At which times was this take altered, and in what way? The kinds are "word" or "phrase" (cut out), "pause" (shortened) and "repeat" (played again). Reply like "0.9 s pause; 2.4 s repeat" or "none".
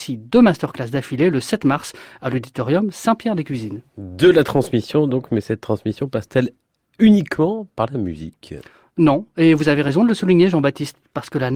none